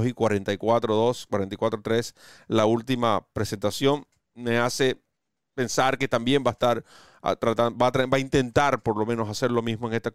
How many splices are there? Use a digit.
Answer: 0